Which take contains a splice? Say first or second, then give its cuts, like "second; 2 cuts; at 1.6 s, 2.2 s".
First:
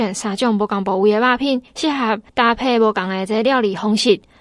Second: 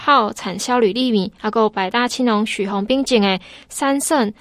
first; 2 cuts; at 1.7 s, 2.3 s